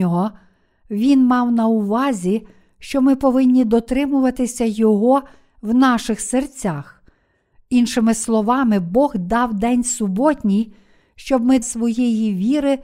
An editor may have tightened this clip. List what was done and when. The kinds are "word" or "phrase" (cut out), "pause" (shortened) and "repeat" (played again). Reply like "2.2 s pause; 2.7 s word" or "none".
11.6 s word

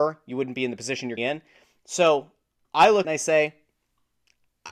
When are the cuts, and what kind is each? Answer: 1.2 s word; 2.6 s word; 3.0 s phrase

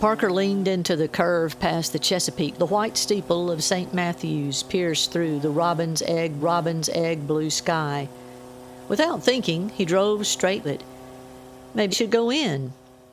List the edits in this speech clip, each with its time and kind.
2.6 s word; 6.4 s repeat; 10.6 s word; 11.9 s word

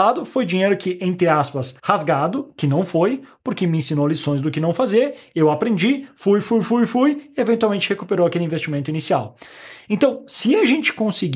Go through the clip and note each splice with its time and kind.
1.8 s pause; 6.4 s word

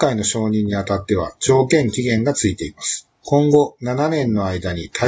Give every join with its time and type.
3.2 s pause

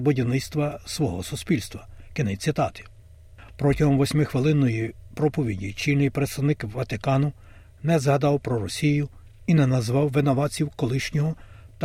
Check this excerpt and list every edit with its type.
none

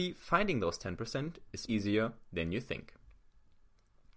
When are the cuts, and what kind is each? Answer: 1.7 s word

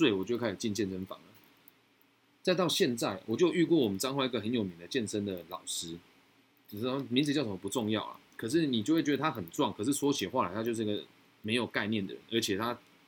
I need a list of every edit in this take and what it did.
none

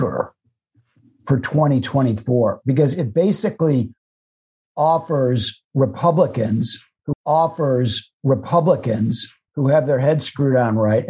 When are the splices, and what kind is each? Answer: 7.1 s repeat

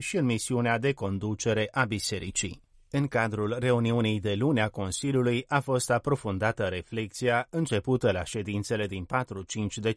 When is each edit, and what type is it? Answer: none

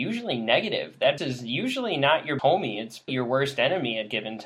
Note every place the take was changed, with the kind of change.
1.2 s word; 2.4 s word; 3.1 s word

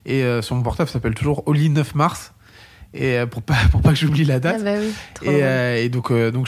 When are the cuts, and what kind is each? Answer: none

